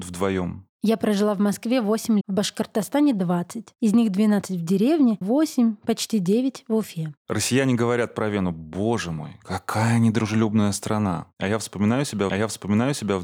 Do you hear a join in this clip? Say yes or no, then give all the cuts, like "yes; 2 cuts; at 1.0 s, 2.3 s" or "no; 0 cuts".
yes; 3 cuts; at 2.2 s, 5.2 s, 12.3 s